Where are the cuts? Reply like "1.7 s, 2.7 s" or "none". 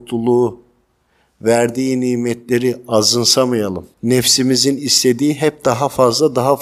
3.9 s